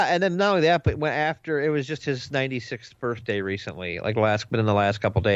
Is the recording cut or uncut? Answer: uncut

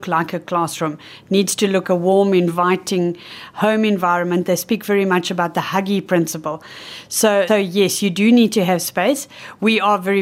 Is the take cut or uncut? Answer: cut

